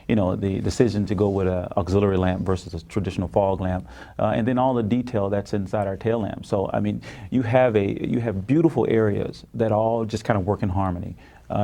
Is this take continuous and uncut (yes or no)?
yes